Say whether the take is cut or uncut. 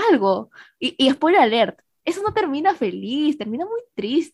uncut